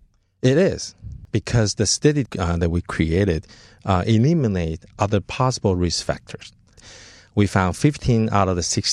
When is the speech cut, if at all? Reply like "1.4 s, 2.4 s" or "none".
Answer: 2.3 s